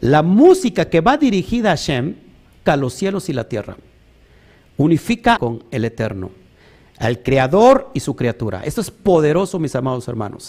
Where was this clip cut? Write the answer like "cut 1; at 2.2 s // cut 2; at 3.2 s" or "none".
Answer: cut 1; at 2.7 s // cut 2; at 5.4 s